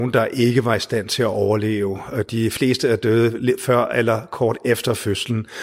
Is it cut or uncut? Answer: uncut